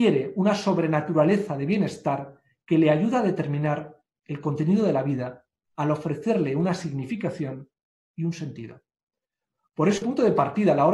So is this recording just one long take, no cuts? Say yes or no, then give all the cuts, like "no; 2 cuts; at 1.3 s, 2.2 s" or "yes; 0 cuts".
no; 1 cut; at 10.0 s